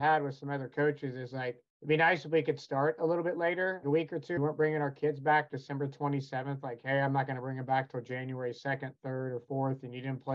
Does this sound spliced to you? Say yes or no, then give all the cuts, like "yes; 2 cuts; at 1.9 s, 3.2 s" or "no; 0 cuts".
yes; 3 cuts; at 1.7 s, 3.8 s, 4.4 s